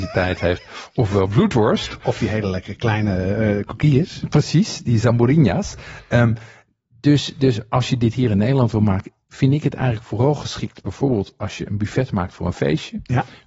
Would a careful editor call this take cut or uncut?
uncut